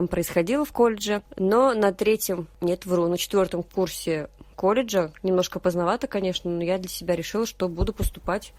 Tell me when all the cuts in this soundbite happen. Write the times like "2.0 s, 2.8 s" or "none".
none